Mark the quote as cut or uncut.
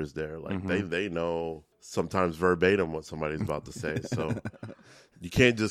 cut